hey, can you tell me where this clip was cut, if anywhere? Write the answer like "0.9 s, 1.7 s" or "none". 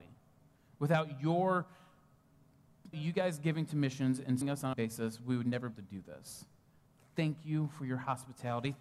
2.9 s, 4.4 s, 4.7 s, 5.7 s